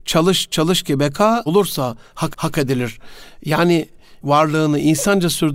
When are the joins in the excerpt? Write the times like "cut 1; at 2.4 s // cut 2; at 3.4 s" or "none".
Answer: cut 1; at 1.5 s // cut 2; at 2.3 s // cut 3; at 4.2 s